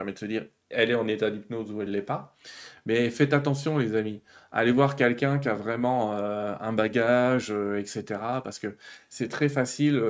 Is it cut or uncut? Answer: uncut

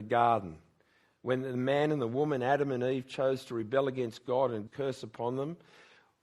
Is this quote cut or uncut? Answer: cut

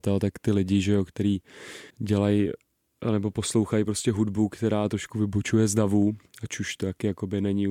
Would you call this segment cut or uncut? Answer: cut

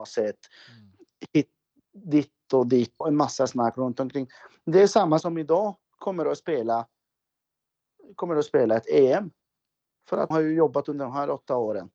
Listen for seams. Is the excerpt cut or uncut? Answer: cut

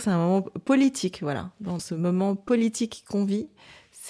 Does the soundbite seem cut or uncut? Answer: cut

